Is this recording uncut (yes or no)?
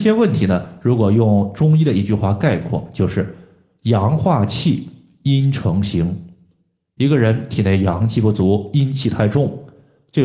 yes